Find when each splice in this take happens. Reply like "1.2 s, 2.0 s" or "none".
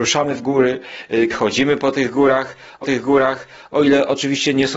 1.3 s, 2.8 s